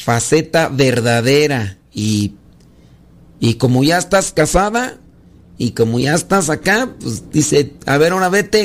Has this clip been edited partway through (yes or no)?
no